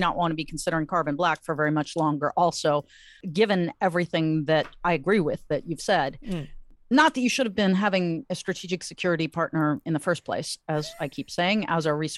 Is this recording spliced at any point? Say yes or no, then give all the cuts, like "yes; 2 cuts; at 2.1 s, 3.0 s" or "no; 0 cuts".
no; 0 cuts